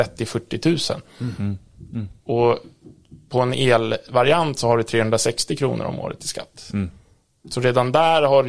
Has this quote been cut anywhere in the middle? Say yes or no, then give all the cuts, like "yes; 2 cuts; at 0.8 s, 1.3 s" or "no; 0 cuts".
no; 0 cuts